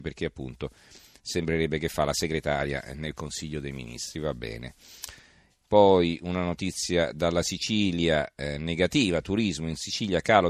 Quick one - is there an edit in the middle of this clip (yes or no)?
no